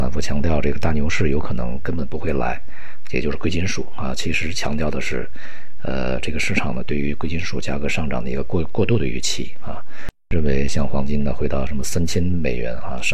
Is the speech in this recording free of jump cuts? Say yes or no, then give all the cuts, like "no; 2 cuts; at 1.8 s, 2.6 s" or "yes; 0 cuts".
yes; 0 cuts